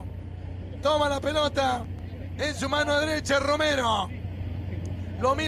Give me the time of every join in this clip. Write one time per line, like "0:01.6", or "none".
none